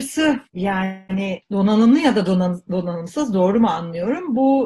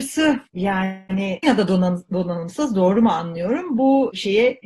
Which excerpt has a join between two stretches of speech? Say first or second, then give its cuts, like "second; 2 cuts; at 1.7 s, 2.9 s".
second; 1 cut; at 1.4 s